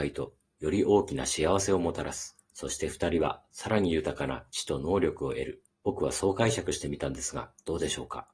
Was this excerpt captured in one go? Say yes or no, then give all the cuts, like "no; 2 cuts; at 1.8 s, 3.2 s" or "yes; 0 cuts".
no; 2 cuts; at 2.4 s, 5.7 s